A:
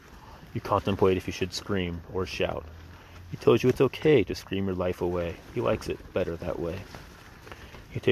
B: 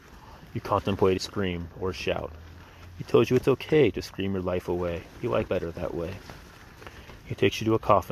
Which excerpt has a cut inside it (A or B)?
B